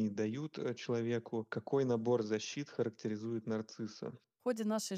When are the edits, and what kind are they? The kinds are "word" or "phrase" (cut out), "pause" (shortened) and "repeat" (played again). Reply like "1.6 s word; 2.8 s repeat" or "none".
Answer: none